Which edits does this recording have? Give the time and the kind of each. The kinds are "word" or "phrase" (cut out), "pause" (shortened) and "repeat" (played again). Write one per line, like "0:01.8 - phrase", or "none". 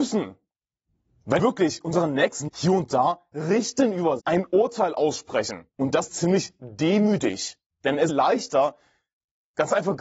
0:01.4 - word
0:02.5 - word
0:04.2 - word
0:05.7 - pause
0:06.1 - word
0:07.7 - pause
0:08.1 - phrase